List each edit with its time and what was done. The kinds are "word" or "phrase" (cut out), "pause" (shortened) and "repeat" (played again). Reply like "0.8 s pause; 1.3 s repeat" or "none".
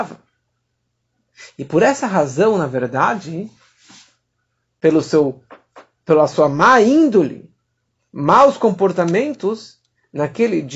none